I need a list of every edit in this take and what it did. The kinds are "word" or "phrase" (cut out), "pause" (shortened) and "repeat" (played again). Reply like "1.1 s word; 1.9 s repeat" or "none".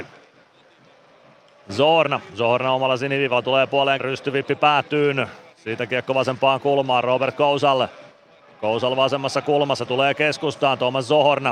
4.0 s word